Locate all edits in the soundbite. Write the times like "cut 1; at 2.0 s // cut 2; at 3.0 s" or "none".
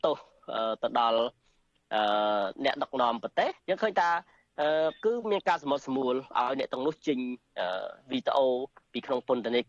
cut 1; at 3.6 s